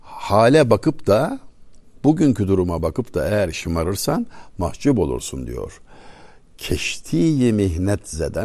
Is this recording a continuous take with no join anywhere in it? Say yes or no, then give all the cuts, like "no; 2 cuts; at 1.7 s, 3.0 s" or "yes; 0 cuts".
yes; 0 cuts